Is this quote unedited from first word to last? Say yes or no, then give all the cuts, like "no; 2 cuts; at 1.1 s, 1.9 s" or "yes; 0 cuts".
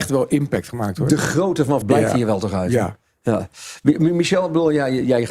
no; 1 cut; at 1.8 s